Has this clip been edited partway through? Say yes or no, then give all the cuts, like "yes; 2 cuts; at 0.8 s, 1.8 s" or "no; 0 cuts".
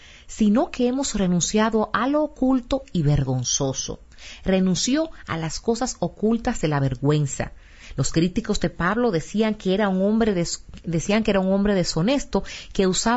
no; 0 cuts